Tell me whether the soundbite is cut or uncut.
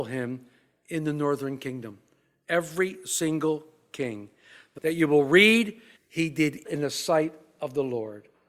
cut